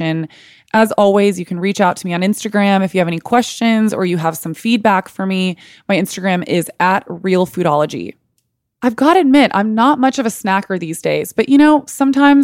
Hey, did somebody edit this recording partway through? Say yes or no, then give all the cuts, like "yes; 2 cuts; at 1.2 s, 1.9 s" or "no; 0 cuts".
no; 0 cuts